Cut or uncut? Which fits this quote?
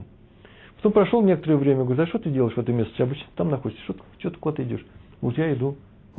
uncut